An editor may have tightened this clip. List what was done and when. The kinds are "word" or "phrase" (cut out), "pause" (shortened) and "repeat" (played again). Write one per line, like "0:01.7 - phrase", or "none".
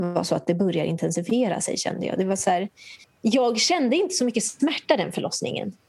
0:03.0 - pause